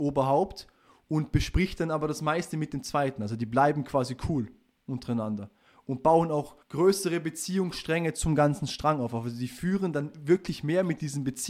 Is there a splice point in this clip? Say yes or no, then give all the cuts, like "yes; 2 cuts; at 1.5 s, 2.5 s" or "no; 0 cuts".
yes; 1 cut; at 6.6 s